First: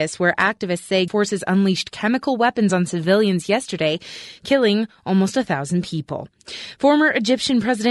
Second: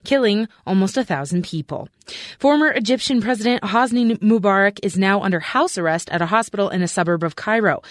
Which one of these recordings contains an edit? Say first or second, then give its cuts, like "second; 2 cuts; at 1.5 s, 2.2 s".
first; 1 cut; at 1.1 s